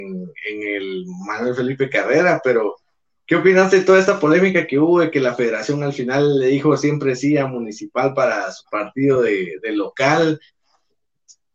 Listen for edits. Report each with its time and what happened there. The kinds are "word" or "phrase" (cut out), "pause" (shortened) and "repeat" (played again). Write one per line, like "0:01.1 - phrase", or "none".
none